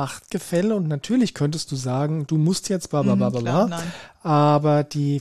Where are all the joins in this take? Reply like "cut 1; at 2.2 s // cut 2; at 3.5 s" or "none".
none